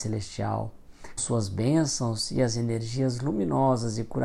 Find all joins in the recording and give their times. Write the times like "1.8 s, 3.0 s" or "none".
1.2 s